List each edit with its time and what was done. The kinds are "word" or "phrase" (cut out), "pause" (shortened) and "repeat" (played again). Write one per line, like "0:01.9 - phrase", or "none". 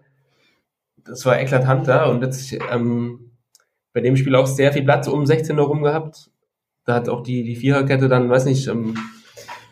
none